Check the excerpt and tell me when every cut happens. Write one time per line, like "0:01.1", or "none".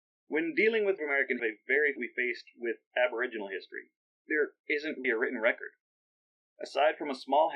0:01.0
0:01.4
0:02.0
0:04.1
0:05.0